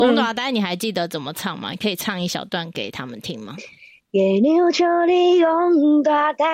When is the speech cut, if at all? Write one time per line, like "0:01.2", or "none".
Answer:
none

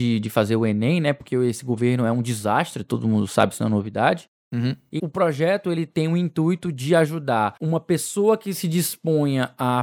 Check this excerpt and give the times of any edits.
0:05.0

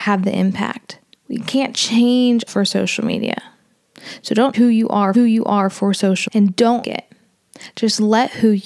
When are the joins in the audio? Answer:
0:01.1
0:02.5
0:04.5
0:05.1
0:06.3
0:06.8

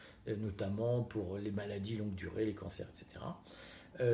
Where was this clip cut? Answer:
none

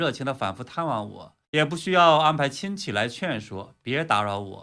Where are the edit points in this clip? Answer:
0:01.4

